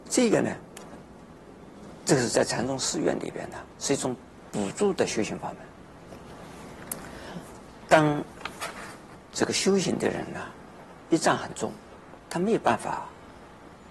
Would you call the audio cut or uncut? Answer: cut